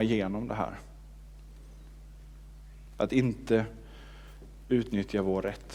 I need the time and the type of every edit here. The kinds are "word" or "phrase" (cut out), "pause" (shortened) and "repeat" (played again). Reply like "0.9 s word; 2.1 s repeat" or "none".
none

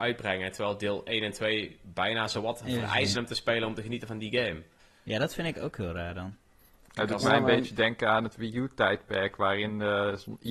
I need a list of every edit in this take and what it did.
3.1 s word; 4.8 s pause

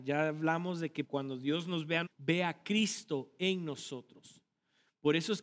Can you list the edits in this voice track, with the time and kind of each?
1.0 s word; 2.1 s word

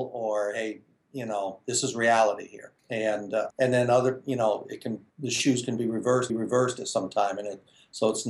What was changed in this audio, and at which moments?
2.8 s pause; 3.5 s word; 5.1 s pause; 6.3 s repeat

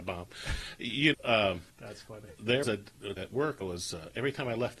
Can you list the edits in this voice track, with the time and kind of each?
1.1 s word; 1.7 s pause; 2.6 s word; 3.2 s word; 3.6 s phrase

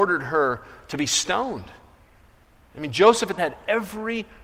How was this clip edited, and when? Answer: 3.4 s phrase

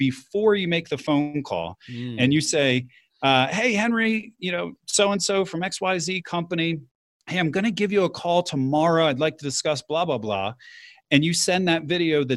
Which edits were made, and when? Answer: none

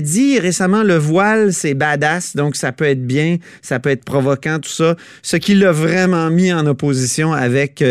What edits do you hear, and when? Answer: none

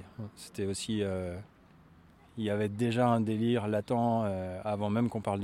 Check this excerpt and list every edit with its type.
none

